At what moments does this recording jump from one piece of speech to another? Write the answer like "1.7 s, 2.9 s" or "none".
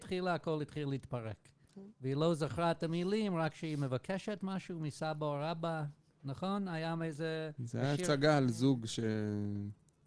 1.9 s, 7.6 s